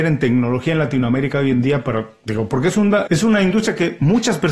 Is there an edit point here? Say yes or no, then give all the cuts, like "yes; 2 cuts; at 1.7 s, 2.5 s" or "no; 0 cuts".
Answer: yes; 1 cut; at 3.1 s